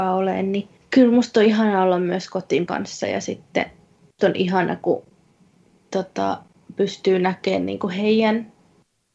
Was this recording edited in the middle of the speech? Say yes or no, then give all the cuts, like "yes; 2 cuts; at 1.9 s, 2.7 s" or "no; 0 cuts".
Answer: yes; 2 cuts; at 2.7 s, 4.2 s